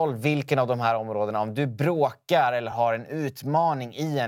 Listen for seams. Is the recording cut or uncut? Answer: uncut